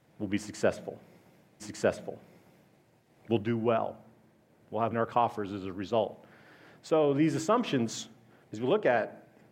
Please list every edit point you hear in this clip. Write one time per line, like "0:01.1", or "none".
0:01.6
0:04.9
0:08.4